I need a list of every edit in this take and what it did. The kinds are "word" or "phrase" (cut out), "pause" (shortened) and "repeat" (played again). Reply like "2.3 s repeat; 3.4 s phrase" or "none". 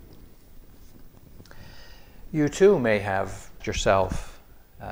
3.6 s word